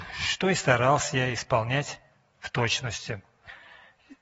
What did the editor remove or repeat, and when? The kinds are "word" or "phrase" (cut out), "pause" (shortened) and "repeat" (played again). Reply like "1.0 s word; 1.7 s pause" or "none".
none